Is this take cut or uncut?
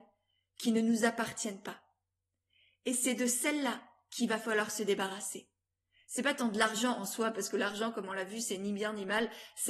uncut